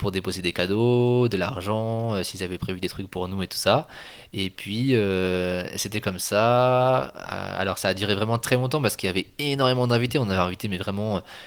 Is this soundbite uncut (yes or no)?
yes